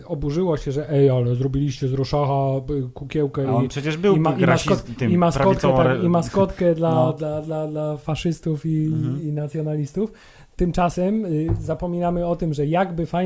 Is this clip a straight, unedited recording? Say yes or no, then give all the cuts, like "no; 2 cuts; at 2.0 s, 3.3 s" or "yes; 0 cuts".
yes; 0 cuts